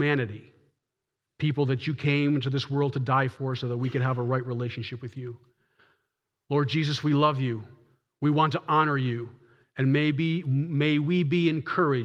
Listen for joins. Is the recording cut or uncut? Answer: uncut